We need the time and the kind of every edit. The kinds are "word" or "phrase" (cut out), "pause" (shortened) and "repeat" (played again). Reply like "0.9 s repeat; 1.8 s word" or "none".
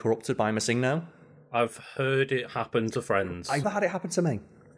3.6 s word